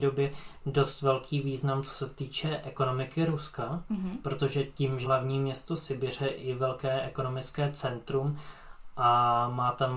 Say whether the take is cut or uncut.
cut